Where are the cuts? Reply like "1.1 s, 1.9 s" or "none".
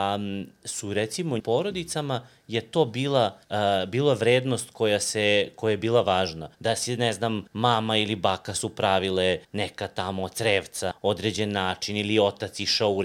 1.4 s, 3.4 s, 6.5 s, 7.5 s, 9.4 s, 10.9 s